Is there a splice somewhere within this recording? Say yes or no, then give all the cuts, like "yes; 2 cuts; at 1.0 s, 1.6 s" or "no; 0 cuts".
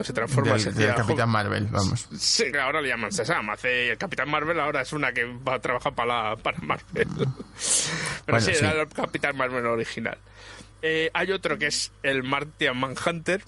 yes; 2 cuts; at 2.5 s, 10.7 s